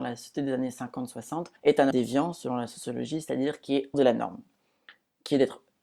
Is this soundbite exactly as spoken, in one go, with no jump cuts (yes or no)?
no